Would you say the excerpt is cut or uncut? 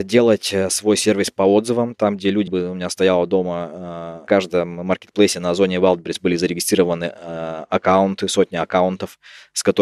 cut